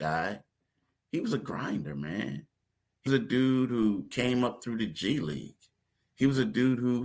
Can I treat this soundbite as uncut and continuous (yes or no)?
no